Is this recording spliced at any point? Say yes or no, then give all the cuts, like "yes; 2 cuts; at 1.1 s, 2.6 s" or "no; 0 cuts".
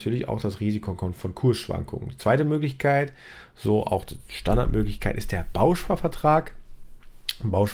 no; 0 cuts